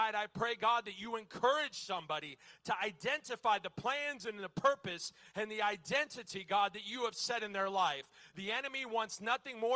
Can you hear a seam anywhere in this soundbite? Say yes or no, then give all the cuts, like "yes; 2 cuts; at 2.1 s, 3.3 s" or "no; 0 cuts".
no; 0 cuts